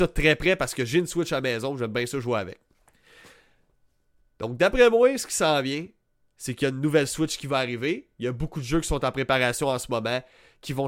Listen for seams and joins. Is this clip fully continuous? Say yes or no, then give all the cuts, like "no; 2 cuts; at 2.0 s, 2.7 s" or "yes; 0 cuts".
yes; 0 cuts